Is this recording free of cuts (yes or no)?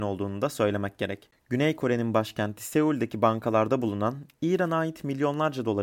yes